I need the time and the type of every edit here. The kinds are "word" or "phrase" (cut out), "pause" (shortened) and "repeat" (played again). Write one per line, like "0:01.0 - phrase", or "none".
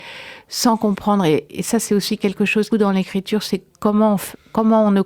0:02.7 - phrase